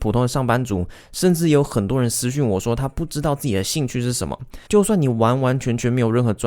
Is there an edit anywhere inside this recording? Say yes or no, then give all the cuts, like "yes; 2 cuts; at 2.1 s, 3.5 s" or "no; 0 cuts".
yes; 1 cut; at 4.7 s